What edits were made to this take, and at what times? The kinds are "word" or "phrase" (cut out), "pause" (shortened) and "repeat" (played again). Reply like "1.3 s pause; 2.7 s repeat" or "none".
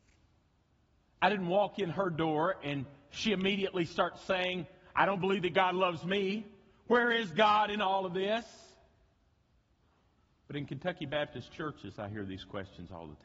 none